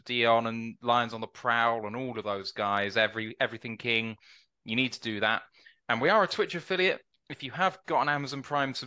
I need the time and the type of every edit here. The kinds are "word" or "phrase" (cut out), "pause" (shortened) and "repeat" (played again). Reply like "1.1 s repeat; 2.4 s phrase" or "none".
none